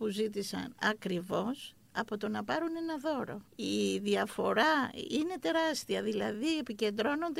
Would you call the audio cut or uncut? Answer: cut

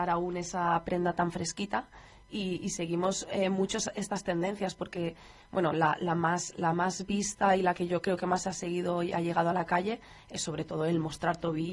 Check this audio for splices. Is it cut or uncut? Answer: uncut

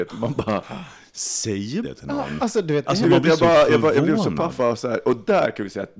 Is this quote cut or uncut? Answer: cut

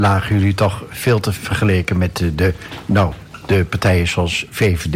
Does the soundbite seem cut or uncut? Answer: cut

